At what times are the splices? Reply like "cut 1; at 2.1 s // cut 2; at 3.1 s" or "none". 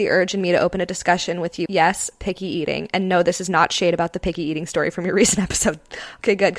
cut 1; at 1.7 s